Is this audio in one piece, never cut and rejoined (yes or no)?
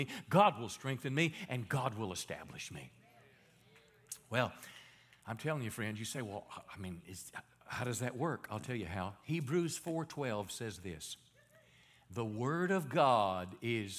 yes